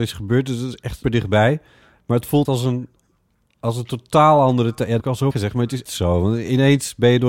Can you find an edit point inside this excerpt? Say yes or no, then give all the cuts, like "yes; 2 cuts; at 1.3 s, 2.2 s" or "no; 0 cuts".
yes; 5 cuts; at 1.0 s, 2.4 s, 5.0 s, 5.3 s, 5.9 s